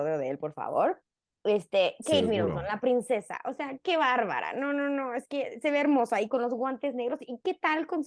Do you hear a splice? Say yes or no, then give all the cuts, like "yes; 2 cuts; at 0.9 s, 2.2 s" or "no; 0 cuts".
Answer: no; 0 cuts